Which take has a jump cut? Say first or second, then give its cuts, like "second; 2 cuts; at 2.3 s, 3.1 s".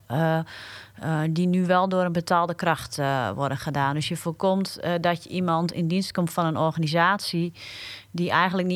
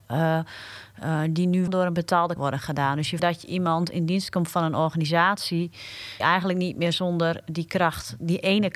second; 4 cuts; at 1.7 s, 2.4 s, 3.2 s, 6.2 s